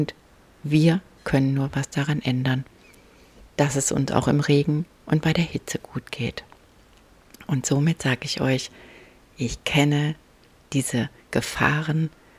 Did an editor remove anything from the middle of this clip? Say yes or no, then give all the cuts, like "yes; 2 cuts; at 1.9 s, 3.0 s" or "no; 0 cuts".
no; 0 cuts